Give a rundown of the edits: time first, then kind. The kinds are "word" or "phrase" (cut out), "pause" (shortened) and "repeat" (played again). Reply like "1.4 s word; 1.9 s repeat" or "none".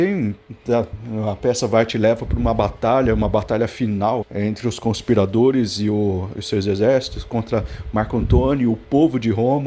4.2 s word